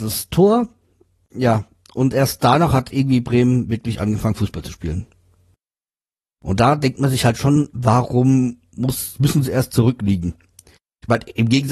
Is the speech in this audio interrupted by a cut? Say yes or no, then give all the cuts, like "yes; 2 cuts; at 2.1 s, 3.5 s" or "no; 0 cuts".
no; 0 cuts